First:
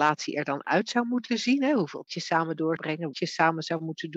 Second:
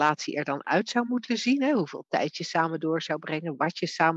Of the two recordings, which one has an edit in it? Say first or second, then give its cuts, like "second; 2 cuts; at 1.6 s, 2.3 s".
first; 3 cuts; at 2.1 s, 2.8 s, 3.1 s